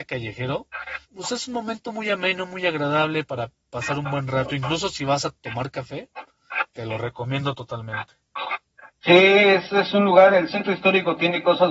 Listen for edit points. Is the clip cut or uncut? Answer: cut